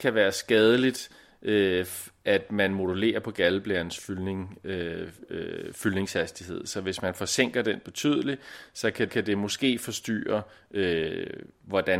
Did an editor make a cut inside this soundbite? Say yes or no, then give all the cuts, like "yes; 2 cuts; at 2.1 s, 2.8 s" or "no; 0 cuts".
yes; 1 cut; at 9.1 s